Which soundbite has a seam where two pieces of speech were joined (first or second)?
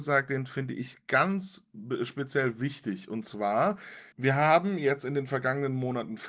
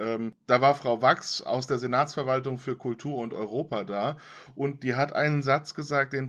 first